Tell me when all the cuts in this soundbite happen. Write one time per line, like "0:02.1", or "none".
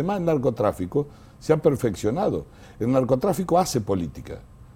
none